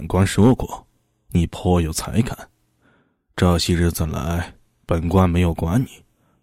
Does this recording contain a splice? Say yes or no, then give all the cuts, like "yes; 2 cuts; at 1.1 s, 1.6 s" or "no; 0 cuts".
no; 0 cuts